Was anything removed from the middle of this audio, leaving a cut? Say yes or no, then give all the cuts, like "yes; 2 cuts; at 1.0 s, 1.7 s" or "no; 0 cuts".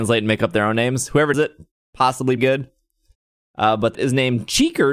yes; 3 cuts; at 1.3 s, 2.4 s, 3.9 s